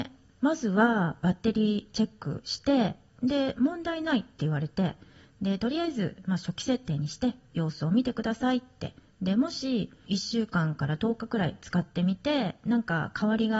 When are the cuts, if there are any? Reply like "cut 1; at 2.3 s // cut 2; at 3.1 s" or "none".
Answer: none